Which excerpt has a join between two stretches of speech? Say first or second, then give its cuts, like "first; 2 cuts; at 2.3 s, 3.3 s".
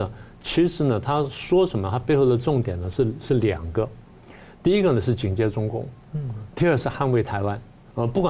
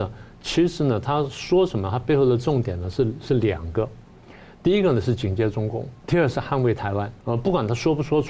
second; 2 cuts; at 6.0 s, 7.2 s